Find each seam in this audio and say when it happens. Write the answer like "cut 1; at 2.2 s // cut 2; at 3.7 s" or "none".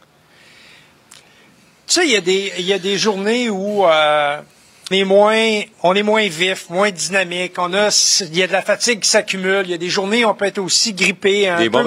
cut 1; at 4.9 s // cut 2; at 5.7 s